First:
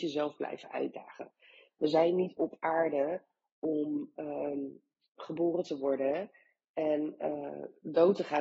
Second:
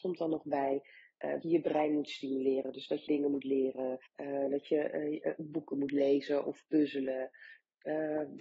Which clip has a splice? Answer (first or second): second